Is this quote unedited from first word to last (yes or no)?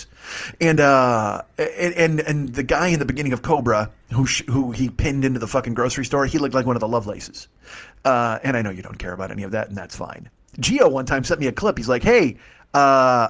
yes